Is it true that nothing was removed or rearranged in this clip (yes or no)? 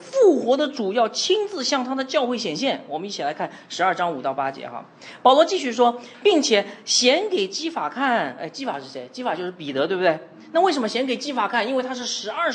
yes